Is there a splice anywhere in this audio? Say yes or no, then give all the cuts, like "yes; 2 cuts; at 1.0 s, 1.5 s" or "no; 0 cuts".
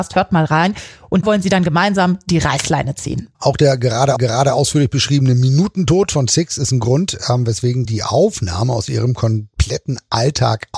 yes; 3 cuts; at 1.2 s, 4.2 s, 7.8 s